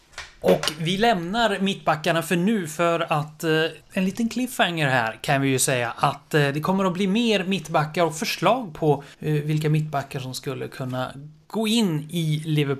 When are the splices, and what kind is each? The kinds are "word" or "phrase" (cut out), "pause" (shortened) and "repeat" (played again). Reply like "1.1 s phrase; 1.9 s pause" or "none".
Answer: 3.8 s pause; 9.1 s pause